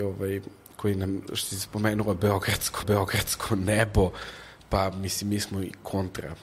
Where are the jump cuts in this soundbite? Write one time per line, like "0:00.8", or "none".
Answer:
0:01.3
0:02.8